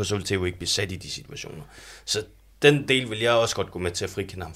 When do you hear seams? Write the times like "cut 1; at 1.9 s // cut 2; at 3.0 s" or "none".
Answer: none